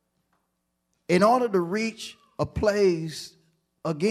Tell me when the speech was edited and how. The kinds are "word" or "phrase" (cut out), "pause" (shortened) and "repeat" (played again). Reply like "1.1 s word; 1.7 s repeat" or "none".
none